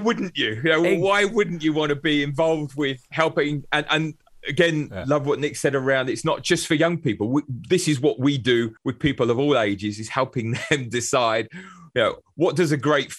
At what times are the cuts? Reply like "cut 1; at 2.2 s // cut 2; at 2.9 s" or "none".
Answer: cut 1; at 8.8 s